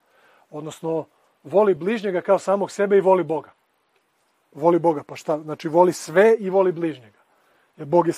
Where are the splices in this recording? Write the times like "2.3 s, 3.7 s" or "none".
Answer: none